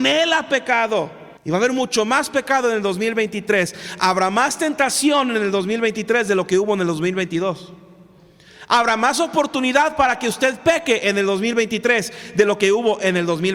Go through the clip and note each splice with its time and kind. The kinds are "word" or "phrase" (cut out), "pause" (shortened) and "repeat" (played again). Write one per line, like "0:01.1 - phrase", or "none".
0:01.4 - pause